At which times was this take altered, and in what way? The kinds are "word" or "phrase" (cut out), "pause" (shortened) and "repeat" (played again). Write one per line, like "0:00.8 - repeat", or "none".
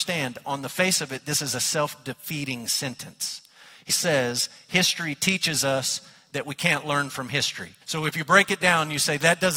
0:03.9 - word
0:07.8 - pause